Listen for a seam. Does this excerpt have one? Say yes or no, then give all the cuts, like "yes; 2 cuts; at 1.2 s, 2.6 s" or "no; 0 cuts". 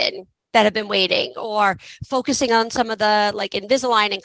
no; 0 cuts